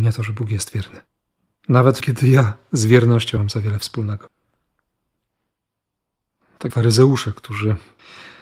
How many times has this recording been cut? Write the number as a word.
three